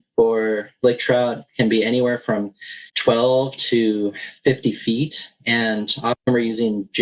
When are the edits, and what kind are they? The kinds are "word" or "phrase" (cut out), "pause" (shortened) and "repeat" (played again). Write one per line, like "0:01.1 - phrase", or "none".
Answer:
0:02.9 - pause
0:05.4 - pause